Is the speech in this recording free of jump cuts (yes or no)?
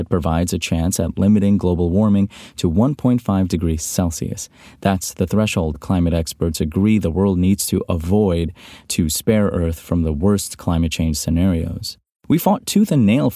yes